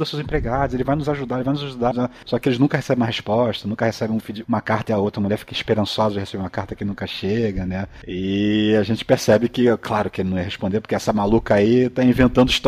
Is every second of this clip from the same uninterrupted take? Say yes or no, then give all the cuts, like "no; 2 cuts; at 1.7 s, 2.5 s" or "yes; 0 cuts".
no; 2 cuts; at 1.9 s, 4.4 s